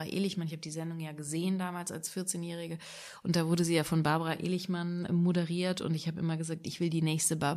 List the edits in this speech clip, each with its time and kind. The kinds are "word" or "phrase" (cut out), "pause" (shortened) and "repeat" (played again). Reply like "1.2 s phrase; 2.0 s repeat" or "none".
5.1 s word